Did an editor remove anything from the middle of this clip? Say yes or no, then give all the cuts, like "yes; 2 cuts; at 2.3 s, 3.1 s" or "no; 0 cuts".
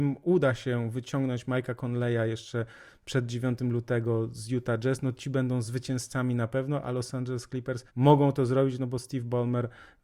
yes; 1 cut; at 7.9 s